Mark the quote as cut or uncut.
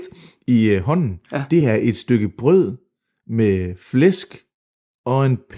uncut